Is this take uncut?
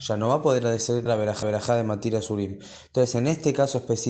no; 2 cuts; at 1.1 s, 1.4 s

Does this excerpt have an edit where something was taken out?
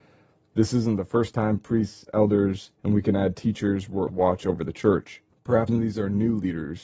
yes; 3 cuts; at 2.7 s, 4.1 s, 5.7 s

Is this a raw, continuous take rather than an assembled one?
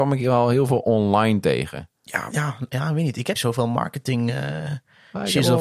no; 3 cuts; at 2.3 s, 2.7 s, 3.4 s

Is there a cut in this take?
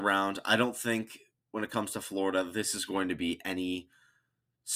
no; 0 cuts

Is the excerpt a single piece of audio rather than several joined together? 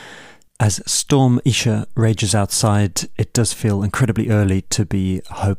yes; 0 cuts

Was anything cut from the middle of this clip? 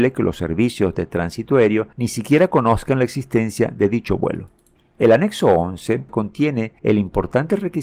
yes; 3 cuts; at 1.9 s, 4.8 s, 6.8 s

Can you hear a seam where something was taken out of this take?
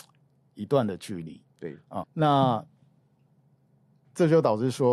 yes; 1 cut; at 2.0 s

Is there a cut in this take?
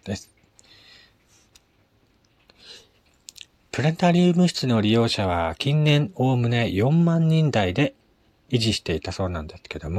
no; 0 cuts

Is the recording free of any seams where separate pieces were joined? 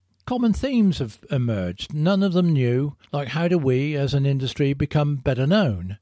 no; 1 cut; at 3.1 s

